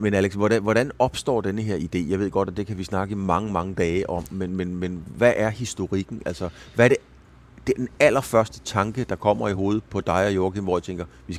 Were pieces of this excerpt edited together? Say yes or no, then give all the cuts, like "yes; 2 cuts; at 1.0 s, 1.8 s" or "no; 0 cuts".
no; 0 cuts